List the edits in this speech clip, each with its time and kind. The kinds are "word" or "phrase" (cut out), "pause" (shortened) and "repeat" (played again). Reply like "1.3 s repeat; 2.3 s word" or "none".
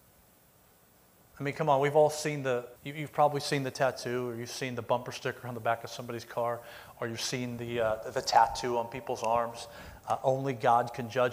2.8 s pause